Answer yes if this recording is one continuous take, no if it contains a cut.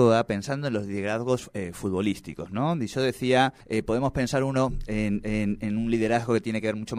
no